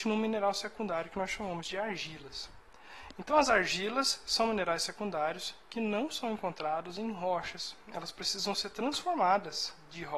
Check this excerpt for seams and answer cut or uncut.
uncut